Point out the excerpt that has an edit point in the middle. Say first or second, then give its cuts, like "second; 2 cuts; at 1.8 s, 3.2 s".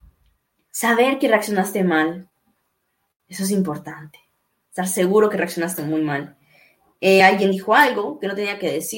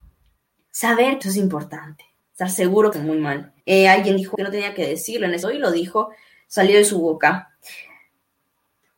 second; 6 cuts; at 1.2 s, 2.2 s, 2.9 s, 3.6 s, 4.3 s, 5.4 s